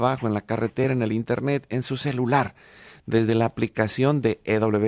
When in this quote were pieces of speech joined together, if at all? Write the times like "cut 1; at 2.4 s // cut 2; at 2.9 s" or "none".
none